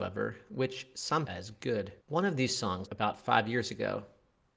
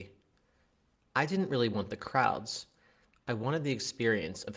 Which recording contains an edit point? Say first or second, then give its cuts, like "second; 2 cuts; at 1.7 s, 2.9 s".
first; 3 cuts; at 1.3 s, 2.0 s, 2.8 s